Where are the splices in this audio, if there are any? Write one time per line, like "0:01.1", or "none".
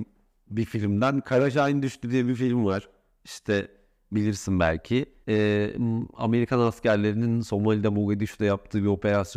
0:05.2